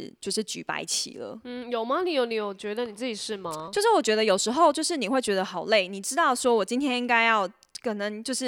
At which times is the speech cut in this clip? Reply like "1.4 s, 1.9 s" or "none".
none